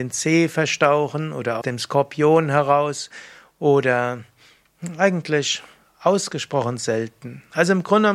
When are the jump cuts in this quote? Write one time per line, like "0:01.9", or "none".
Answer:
0:01.6